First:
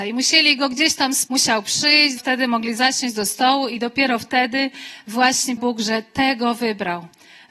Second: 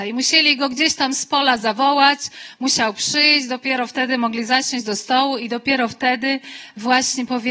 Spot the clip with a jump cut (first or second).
first